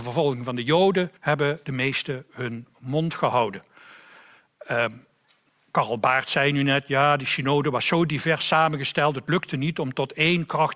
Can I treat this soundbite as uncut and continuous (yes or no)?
no